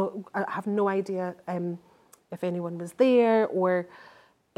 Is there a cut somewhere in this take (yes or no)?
no